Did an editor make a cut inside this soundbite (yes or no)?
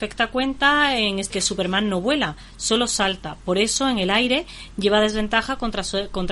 yes